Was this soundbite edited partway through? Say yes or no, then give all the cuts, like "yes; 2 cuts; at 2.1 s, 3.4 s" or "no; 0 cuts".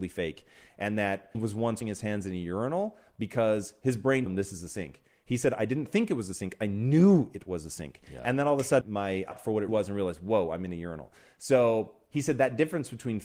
yes; 6 cuts; at 1.3 s, 1.8 s, 4.3 s, 8.8 s, 9.3 s, 9.7 s